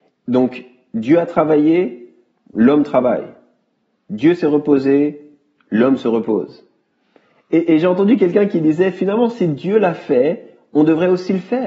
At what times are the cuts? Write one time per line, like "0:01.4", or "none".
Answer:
none